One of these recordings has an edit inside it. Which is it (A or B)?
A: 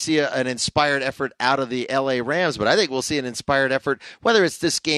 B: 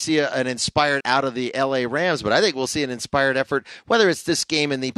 B